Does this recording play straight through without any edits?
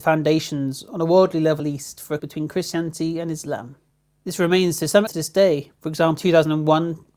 no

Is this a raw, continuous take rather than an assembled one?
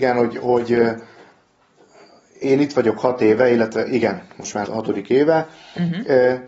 no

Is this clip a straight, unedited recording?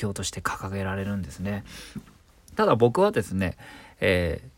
yes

